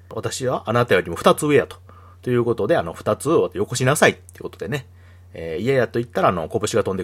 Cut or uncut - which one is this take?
uncut